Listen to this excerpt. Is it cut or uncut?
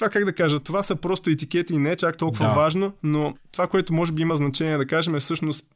uncut